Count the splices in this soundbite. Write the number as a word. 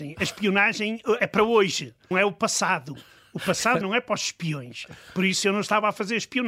three